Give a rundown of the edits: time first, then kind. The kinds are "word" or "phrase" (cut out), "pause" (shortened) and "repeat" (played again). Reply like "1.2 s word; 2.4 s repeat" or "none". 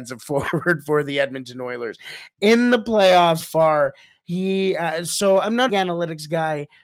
3.4 s word; 5.7 s phrase